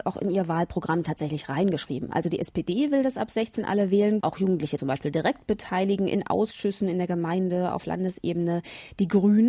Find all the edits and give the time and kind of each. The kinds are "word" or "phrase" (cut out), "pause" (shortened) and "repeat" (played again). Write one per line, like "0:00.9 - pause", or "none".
0:04.2 - word
0:04.8 - word